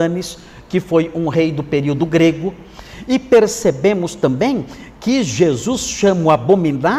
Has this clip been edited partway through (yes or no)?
no